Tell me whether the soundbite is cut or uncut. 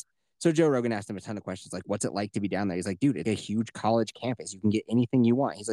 cut